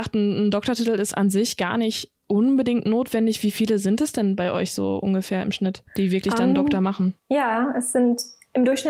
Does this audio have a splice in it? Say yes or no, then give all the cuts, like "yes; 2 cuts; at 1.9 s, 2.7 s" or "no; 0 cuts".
yes; 3 cuts; at 2.2 s, 5.9 s, 7.2 s